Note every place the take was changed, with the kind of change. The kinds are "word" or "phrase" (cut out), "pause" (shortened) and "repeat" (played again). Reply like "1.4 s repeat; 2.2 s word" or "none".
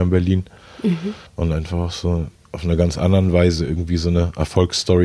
1.3 s pause; 2.3 s pause